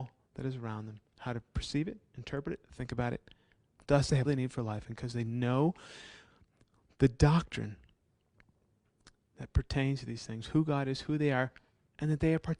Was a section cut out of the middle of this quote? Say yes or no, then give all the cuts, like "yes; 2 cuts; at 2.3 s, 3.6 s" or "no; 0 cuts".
yes; 2 cuts; at 4.2 s, 4.9 s